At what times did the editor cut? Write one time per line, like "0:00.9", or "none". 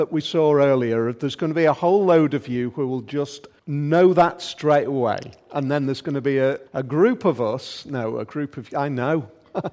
0:03.6
0:06.7